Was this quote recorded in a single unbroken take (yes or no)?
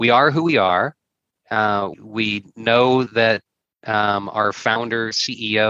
no